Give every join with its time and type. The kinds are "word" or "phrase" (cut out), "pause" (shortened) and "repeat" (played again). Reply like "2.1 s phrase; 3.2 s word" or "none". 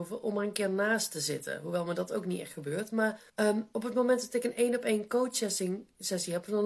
3.3 s pause